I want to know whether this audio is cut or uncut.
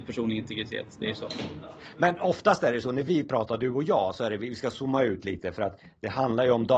uncut